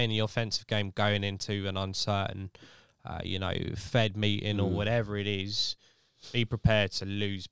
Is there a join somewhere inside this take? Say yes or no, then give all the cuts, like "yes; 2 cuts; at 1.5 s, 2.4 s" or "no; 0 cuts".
no; 0 cuts